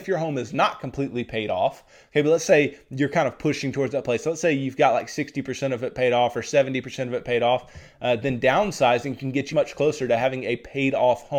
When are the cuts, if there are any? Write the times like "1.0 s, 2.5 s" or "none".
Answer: 9.5 s